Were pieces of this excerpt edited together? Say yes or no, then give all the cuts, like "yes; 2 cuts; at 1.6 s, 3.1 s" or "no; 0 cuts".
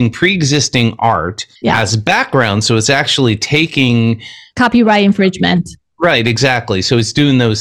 yes; 1 cut; at 1.6 s